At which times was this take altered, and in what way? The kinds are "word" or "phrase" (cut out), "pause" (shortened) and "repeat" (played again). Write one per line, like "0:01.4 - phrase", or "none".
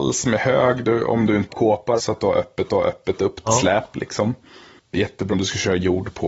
0:01.5 - word
0:02.0 - word
0:02.7 - repeat
0:03.5 - phrase
0:05.3 - word